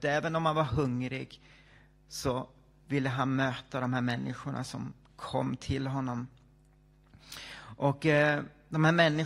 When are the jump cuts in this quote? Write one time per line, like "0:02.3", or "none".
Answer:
none